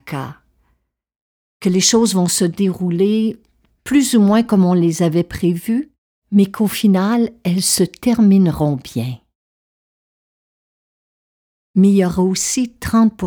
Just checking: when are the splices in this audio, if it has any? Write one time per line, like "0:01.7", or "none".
none